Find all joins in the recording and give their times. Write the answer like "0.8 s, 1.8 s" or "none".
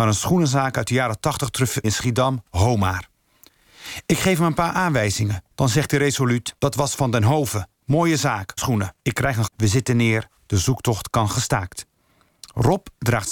1.8 s, 5.5 s, 6.6 s, 7.7 s, 8.6 s, 9.0 s, 9.5 s, 10.4 s